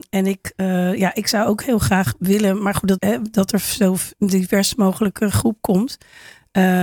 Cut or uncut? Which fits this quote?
cut